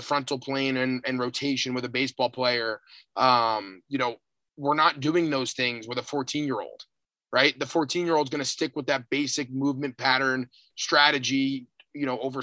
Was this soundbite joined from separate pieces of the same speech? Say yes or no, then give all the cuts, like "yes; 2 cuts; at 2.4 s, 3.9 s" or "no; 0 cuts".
no; 0 cuts